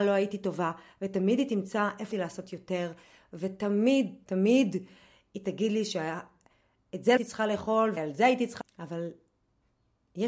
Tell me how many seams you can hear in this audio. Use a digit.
5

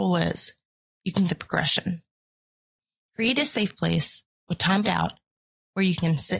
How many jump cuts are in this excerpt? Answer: 2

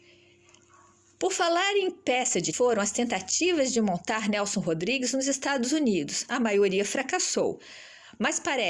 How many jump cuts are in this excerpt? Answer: 1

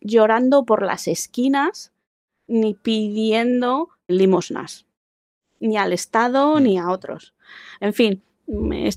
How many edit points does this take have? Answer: 1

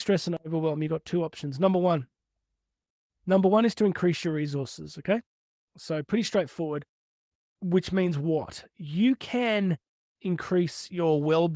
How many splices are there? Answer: 0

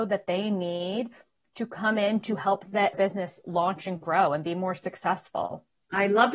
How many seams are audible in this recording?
1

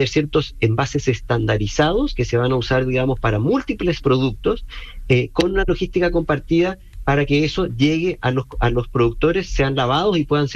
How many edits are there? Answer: 0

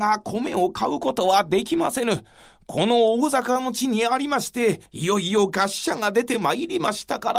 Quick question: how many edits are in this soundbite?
1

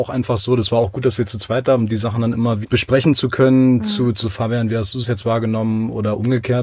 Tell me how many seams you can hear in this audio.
3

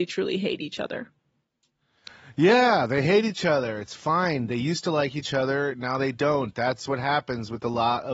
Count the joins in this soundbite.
0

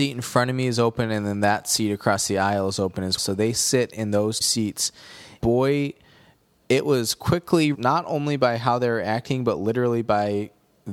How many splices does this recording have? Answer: 4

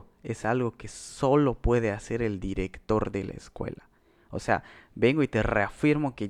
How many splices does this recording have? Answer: 0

